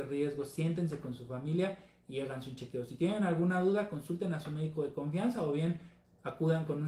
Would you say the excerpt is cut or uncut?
uncut